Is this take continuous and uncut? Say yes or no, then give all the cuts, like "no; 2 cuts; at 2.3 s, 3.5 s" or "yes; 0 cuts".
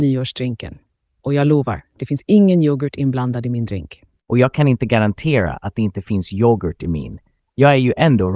yes; 0 cuts